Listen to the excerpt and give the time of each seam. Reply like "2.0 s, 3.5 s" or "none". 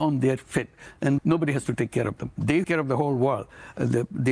1.2 s, 2.6 s

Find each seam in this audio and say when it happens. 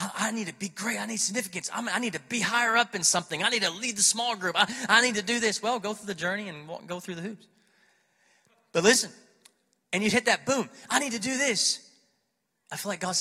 none

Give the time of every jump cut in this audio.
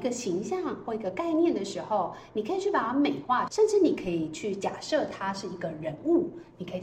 3.5 s

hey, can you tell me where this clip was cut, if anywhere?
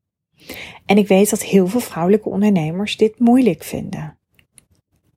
none

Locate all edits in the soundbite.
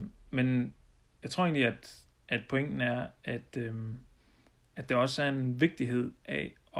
none

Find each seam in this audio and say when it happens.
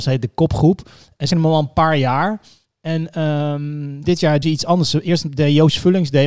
1.3 s, 4.0 s, 4.4 s

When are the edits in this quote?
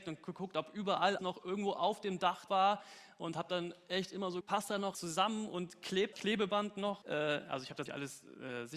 1.2 s, 2.5 s, 4.4 s, 4.9 s, 6.1 s, 7.0 s, 7.9 s

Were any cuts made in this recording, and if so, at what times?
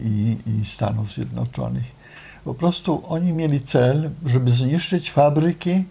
none

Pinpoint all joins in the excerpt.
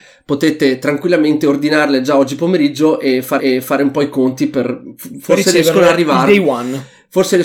3.4 s

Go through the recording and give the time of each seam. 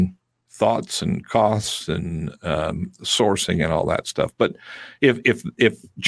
none

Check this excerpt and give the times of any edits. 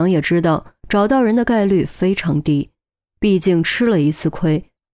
none

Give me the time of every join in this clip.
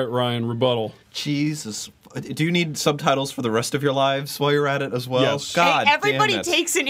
1.0 s

